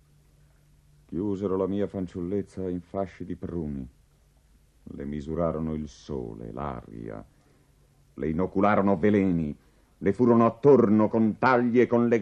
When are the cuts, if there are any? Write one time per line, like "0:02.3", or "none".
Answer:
none